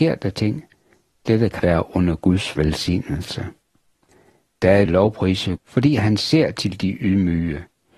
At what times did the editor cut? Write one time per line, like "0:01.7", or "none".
0:01.6
0:04.9
0:05.6